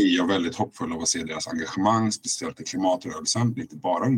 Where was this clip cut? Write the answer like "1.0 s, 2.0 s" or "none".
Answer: none